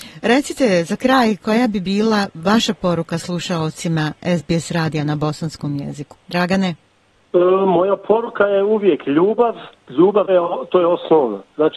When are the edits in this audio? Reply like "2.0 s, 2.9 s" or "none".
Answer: 6.2 s, 10.3 s